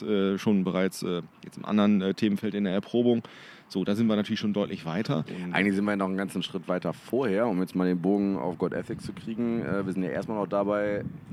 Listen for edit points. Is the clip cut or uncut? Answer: uncut